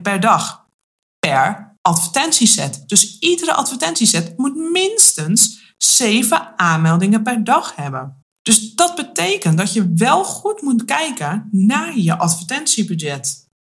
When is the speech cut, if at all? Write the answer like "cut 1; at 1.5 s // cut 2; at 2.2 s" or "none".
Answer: cut 1; at 8.2 s